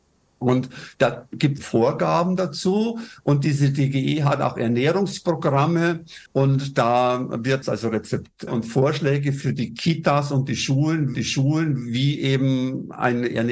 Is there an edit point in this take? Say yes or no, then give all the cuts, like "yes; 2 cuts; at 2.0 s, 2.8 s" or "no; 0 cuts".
yes; 5 cuts; at 1.6 s, 6.3 s, 7.6 s, 8.5 s, 11.1 s